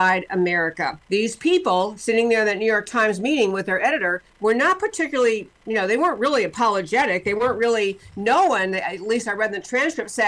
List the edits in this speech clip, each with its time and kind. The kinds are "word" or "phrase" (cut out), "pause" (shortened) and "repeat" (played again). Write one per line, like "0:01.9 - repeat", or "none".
0:01.0 - pause
0:04.3 - pause